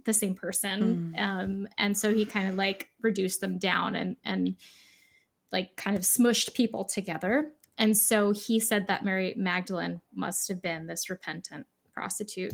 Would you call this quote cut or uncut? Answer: uncut